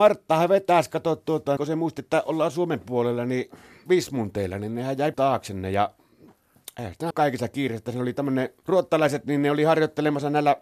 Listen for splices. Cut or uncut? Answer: cut